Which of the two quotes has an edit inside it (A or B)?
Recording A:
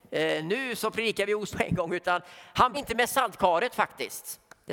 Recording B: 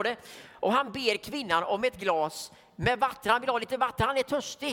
A